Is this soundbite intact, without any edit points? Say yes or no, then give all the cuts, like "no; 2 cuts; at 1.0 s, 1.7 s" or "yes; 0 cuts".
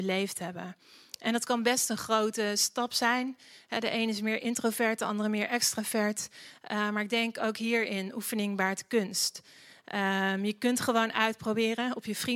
yes; 0 cuts